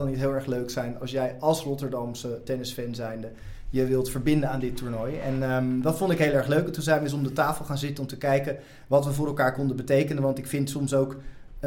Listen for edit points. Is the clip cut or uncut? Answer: uncut